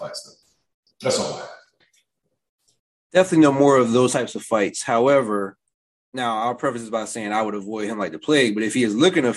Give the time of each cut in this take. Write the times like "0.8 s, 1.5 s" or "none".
none